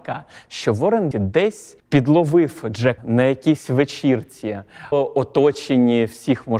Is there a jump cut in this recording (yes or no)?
yes